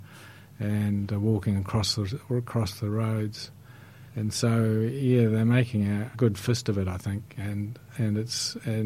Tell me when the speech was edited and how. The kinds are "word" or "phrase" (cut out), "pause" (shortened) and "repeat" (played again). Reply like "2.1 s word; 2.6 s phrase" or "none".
4.1 s pause; 6.1 s word